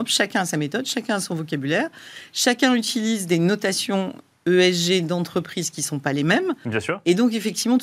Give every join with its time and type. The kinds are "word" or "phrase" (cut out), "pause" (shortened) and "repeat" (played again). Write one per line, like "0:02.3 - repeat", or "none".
none